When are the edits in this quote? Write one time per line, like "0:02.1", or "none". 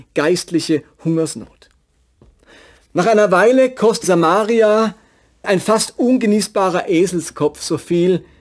0:04.0
0:05.4